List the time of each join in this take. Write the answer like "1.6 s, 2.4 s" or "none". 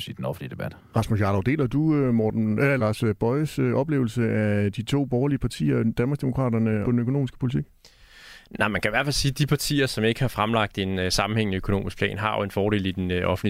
2.8 s, 6.8 s